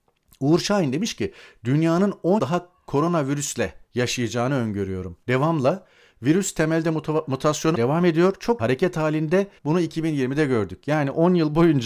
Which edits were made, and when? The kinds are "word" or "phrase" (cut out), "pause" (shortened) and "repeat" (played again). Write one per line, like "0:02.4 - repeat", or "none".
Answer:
0:02.4 - word
0:03.8 - pause
0:05.2 - pause
0:07.7 - word
0:08.6 - phrase
0:09.6 - pause